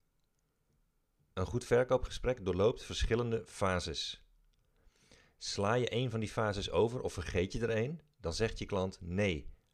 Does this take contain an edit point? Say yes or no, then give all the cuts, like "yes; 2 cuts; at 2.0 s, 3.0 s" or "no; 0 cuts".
no; 0 cuts